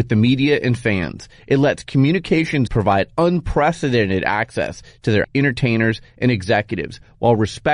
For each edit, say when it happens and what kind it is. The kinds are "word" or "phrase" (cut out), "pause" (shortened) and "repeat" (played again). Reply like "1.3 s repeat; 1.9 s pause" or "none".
2.7 s word; 5.2 s word